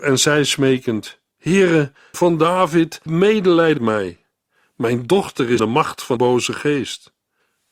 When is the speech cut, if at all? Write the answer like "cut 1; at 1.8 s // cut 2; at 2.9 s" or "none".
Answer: cut 1; at 2.1 s // cut 2; at 3.1 s // cut 3; at 3.8 s // cut 4; at 5.6 s // cut 5; at 6.2 s